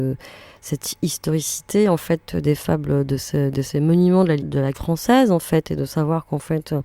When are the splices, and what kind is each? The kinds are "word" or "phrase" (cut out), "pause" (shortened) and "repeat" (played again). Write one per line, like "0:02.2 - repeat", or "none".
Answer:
0:04.4 - word
0:04.7 - word